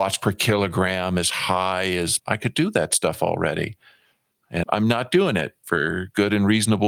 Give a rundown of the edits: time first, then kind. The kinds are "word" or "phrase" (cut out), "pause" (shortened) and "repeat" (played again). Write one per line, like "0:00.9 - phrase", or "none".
0:02.2 - word
0:04.6 - word